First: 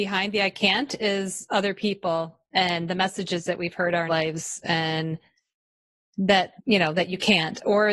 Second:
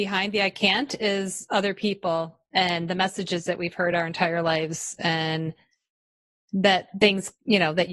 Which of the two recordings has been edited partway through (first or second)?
first